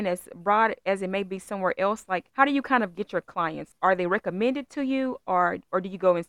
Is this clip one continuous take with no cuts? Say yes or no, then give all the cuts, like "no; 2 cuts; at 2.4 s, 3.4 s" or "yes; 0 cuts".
no; 2 cuts; at 2.3 s, 3.7 s